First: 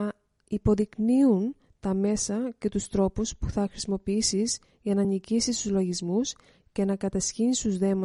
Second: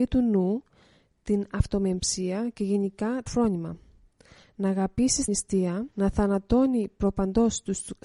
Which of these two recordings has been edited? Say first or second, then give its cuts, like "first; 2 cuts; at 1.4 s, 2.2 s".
second; 3 cuts; at 3.3 s, 5.3 s, 5.9 s